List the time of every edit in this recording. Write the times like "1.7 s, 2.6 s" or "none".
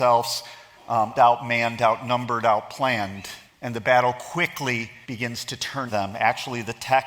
1.1 s, 3.5 s, 5.0 s, 5.9 s